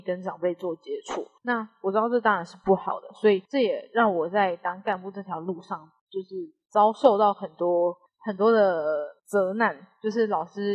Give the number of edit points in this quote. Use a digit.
5